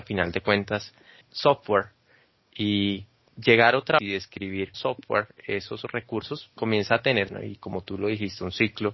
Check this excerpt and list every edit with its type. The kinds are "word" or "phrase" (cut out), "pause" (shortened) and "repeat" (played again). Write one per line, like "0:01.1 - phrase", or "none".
0:01.2 - word
0:03.3 - word
0:04.0 - word
0:04.7 - word
0:06.5 - word
0:07.3 - word